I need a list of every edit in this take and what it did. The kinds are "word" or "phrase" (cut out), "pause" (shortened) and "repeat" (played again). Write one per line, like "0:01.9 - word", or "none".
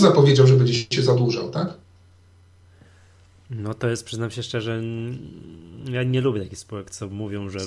none